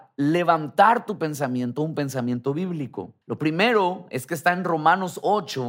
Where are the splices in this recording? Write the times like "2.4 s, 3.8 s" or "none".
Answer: 3.2 s